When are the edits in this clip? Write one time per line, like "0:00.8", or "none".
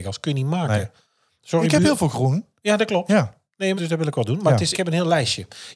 0:03.8
0:04.7

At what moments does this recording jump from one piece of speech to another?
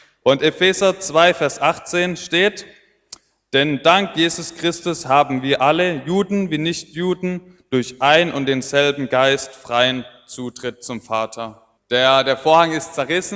0:11.8

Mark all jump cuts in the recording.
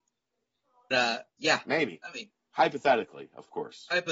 0:00.9

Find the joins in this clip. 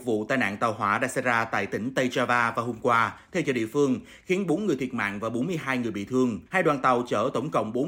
0:06.5

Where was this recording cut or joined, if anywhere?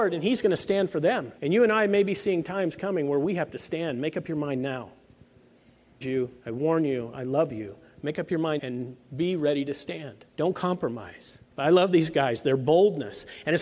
0:01.4
0:06.0
0:06.4
0:08.6
0:10.3
0:11.5

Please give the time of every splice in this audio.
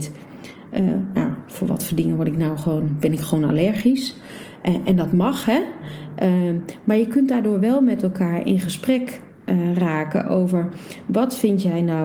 none

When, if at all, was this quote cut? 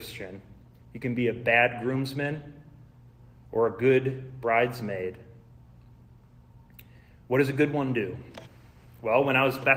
none

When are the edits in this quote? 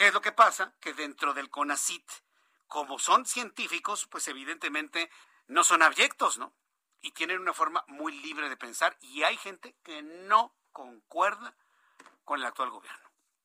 0:05.2

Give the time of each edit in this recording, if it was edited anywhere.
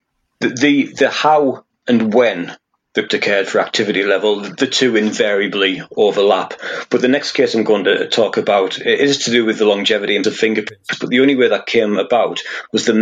0:03.1
0:10.2

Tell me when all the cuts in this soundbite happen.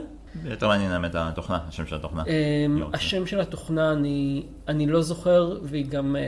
none

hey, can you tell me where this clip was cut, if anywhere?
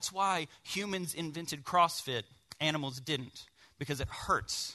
none

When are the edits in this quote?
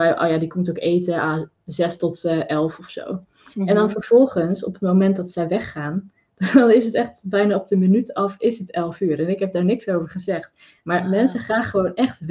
none

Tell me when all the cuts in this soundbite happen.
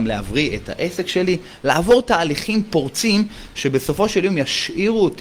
none

